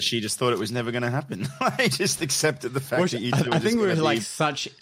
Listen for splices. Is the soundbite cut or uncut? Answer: cut